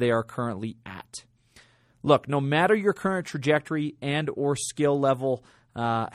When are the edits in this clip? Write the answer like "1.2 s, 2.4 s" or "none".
none